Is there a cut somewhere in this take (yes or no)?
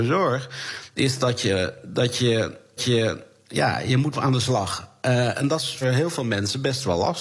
yes